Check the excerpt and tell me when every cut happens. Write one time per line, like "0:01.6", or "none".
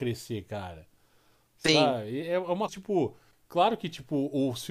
0:02.7
0:03.3